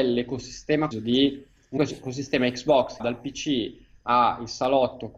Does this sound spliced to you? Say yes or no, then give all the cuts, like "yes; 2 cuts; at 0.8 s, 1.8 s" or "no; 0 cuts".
yes; 3 cuts; at 0.9 s, 1.8 s, 3.0 s